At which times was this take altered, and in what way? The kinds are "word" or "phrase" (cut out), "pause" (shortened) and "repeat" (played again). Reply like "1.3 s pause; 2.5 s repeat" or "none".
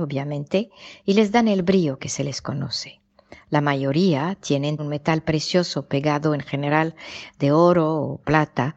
4.8 s word